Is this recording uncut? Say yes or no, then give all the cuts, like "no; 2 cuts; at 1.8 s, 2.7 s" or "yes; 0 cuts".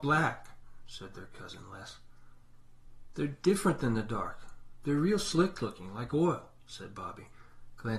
yes; 0 cuts